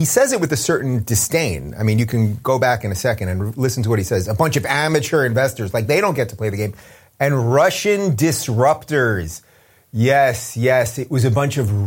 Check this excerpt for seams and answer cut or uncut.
uncut